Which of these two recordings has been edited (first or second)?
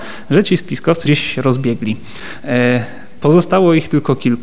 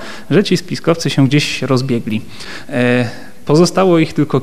first